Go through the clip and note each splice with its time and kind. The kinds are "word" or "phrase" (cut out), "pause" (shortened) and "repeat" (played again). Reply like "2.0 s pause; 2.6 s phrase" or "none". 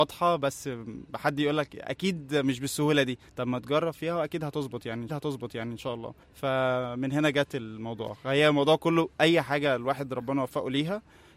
3.3 s pause; 5.1 s repeat; 6.2 s pause